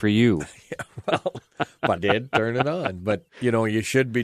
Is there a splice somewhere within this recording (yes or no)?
yes